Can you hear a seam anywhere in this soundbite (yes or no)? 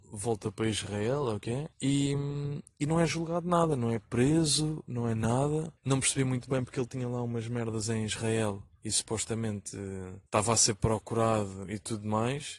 yes